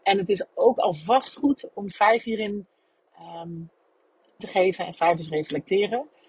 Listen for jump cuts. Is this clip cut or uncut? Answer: cut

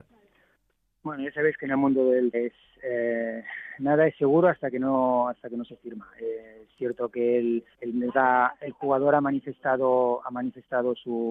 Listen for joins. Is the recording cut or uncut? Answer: cut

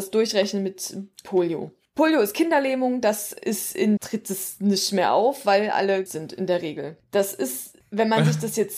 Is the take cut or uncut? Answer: cut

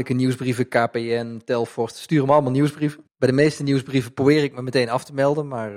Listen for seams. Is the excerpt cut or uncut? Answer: cut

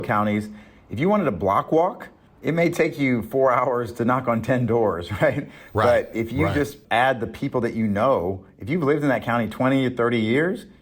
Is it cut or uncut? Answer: cut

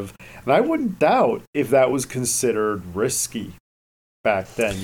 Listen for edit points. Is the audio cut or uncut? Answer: uncut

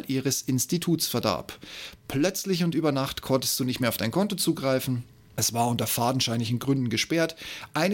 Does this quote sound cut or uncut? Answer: uncut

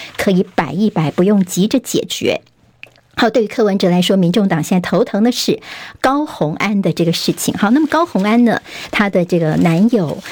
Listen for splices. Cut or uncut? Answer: uncut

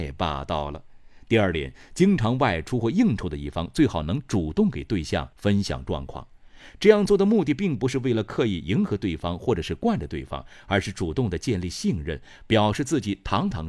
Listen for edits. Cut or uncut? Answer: cut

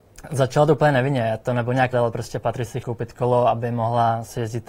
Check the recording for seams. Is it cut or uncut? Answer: cut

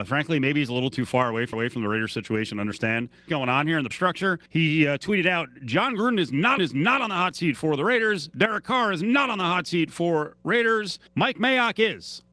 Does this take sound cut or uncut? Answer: cut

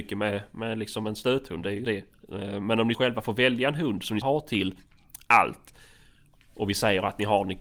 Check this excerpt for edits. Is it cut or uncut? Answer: cut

